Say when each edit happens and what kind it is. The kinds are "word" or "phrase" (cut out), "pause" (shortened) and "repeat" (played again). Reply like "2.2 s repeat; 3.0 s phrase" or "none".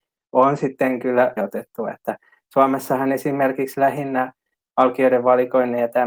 1.4 s phrase